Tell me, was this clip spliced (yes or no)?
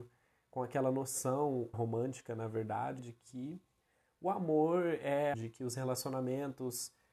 yes